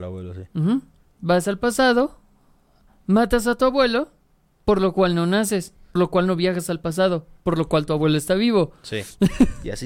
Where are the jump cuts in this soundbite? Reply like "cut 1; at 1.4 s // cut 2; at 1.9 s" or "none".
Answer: cut 1; at 6.0 s